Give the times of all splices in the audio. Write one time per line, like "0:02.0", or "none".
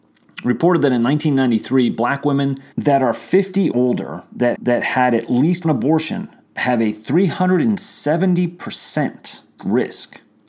0:02.7
0:03.7
0:04.5
0:05.6
0:09.6